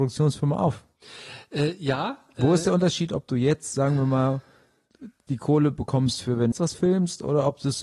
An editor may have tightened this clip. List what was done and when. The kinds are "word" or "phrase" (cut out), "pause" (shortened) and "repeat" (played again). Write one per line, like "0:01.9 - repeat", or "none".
0:06.5 - word